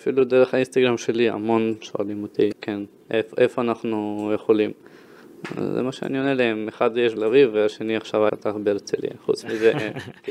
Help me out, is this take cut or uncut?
cut